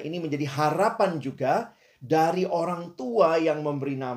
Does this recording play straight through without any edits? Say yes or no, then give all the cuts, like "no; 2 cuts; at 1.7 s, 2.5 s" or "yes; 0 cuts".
yes; 0 cuts